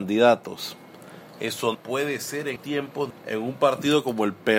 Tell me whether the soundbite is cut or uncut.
cut